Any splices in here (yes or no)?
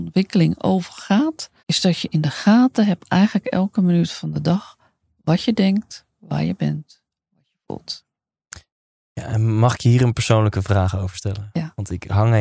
yes